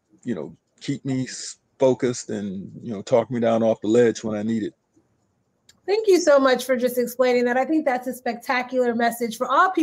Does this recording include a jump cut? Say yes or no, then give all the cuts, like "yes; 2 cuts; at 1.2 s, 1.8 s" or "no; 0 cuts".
no; 0 cuts